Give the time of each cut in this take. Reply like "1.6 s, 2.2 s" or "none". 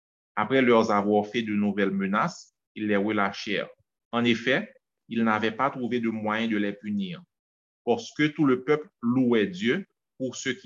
4.0 s